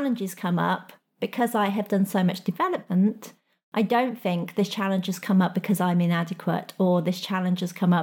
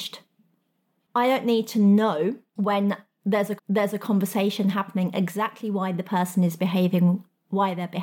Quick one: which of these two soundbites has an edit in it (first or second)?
second